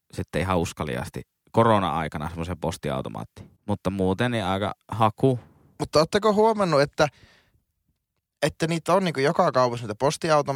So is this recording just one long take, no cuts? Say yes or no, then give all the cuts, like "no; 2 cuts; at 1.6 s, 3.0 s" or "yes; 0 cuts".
no; 1 cut; at 3.6 s